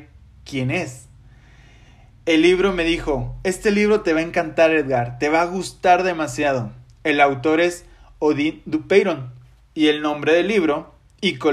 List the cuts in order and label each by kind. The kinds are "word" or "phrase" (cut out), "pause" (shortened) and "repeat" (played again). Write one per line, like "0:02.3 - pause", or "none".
none

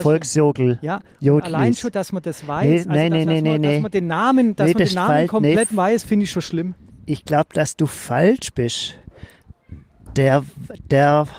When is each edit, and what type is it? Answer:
0:03.2 - repeat
0:06.9 - pause

